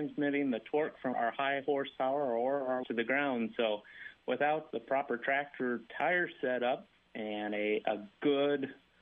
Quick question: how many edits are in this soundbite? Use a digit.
4